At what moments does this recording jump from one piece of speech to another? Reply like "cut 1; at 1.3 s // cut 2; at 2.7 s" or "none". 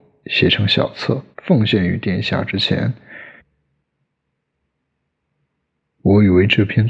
cut 1; at 1.3 s